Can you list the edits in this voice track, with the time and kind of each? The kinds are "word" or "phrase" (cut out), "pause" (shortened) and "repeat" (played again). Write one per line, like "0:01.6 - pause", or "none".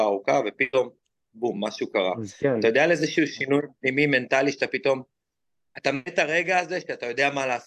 none